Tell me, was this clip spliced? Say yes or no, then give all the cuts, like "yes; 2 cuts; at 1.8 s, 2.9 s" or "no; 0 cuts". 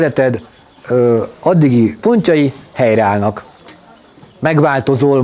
yes; 1 cut; at 2.0 s